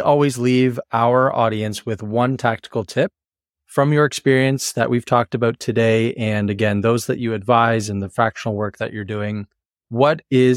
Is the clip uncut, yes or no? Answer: yes